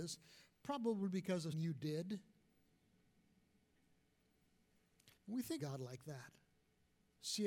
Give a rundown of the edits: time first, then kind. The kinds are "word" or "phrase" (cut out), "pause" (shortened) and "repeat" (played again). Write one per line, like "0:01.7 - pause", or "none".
0:01.5 - word
0:05.2 - pause
0:05.6 - word